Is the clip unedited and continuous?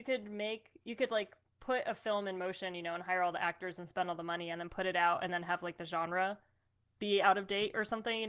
yes; 0 cuts

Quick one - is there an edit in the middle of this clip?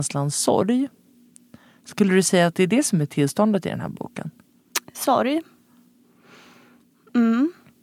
no; 0 cuts

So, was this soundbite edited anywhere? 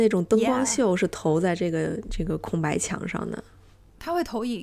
no; 0 cuts

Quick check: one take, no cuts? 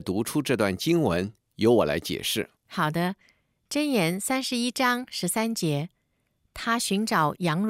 no; 1 cut; at 2.6 s

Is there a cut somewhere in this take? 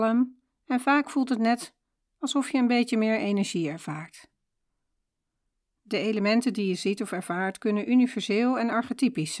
no; 0 cuts

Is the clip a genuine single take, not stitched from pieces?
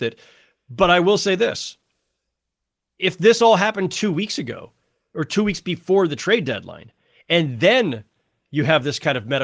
yes; 0 cuts

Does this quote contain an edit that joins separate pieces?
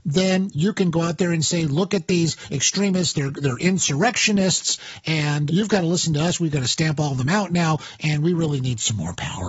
yes; 1 cut; at 5.5 s

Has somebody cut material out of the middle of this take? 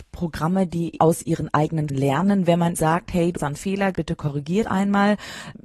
yes; 6 cuts; at 1.0 s, 1.9 s, 2.7 s, 3.4 s, 3.9 s, 4.6 s

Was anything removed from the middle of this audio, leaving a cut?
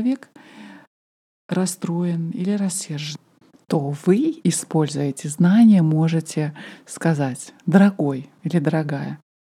no; 0 cuts

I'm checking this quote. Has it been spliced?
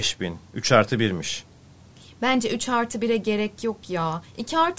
no; 0 cuts

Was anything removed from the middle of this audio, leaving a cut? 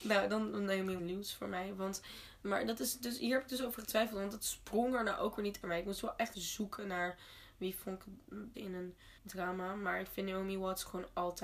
yes; 5 cuts; at 1.0 s, 5.6 s, 6.3 s, 8.5 s, 9.2 s

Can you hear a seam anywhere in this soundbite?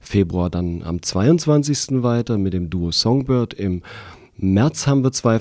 no; 0 cuts

